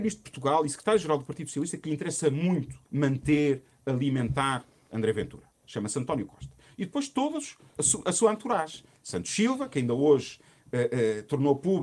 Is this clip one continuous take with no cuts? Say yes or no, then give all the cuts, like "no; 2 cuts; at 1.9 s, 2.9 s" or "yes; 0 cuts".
no; 2 cuts; at 2.9 s, 7.8 s